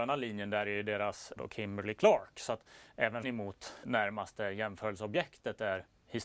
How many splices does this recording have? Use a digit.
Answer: 3